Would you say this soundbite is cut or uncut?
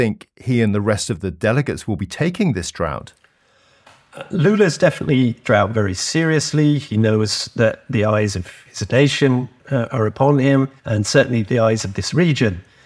cut